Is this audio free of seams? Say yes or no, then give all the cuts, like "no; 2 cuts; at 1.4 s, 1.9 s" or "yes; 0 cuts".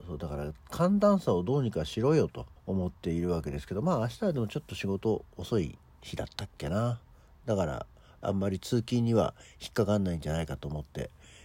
no; 1 cut; at 2.6 s